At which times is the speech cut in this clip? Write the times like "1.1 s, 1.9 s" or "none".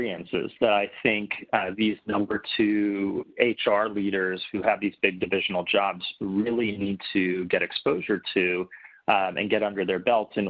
none